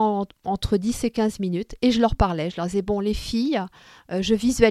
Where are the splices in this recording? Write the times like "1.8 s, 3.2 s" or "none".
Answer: none